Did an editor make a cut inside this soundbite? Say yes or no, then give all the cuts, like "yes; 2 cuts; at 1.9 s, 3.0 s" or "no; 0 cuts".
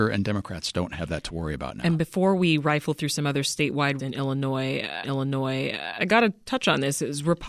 yes; 2 cuts; at 4.0 s, 5.0 s